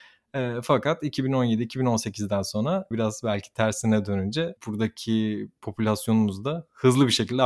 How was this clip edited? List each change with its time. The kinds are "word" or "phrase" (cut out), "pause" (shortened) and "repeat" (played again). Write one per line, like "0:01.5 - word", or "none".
0:02.9 - word
0:04.6 - pause